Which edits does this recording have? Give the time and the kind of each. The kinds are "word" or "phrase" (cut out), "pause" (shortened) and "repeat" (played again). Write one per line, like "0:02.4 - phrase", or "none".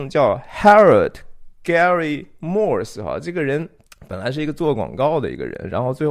0:01.5 - pause
0:03.9 - pause

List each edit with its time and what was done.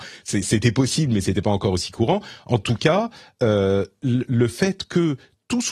none

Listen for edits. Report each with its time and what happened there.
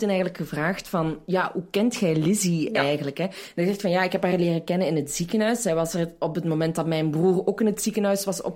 none

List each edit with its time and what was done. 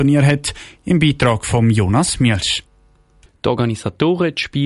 none

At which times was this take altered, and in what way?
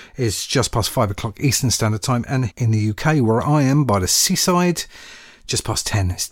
0:02.5 - word

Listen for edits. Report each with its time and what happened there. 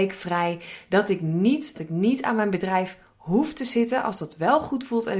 0:01.7 - phrase

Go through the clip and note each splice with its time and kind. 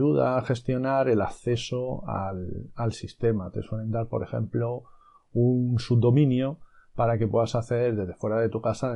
none

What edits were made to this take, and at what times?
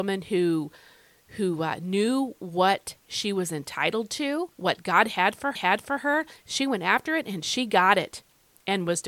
0:04.5 - pause
0:05.6 - repeat

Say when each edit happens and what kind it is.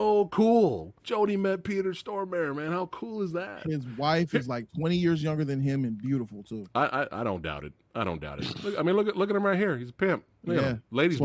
0:01.0 - pause
0:10.3 - pause

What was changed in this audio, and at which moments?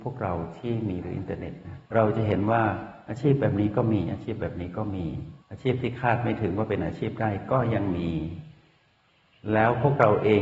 0:01.0 - word
0:01.9 - pause
0:05.4 - pause

